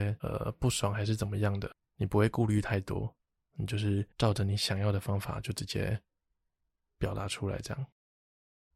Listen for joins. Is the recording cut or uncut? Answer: cut